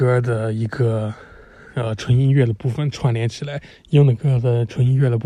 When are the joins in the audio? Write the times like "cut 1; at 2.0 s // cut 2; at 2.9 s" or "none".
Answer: cut 1; at 3.7 s